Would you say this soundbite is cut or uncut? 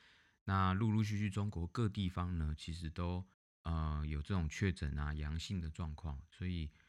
cut